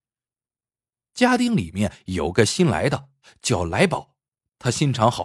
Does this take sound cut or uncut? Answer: uncut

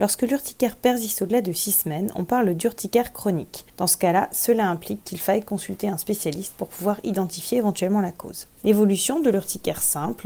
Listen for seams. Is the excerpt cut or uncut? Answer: uncut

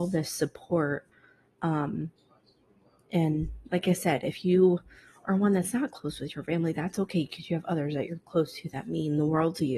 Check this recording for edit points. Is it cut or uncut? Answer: uncut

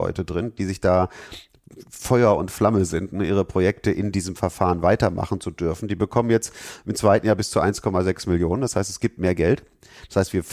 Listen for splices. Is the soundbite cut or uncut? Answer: uncut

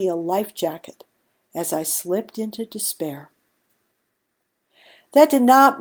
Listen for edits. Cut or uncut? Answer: uncut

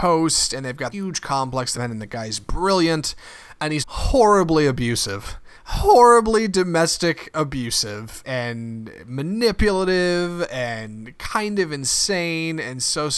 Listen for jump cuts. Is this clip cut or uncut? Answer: cut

